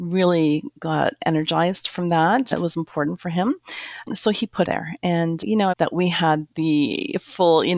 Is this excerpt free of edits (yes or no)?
no